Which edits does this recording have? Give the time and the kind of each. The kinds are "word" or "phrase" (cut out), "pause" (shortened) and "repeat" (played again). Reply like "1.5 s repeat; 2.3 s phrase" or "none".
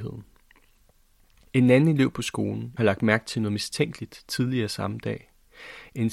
2.8 s phrase